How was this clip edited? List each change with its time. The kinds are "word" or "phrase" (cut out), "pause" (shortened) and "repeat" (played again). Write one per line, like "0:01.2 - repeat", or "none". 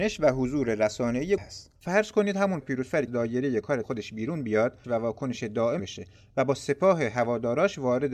0:01.4 - word
0:01.8 - pause
0:02.6 - word
0:03.1 - phrase
0:03.8 - word
0:04.8 - phrase
0:05.8 - word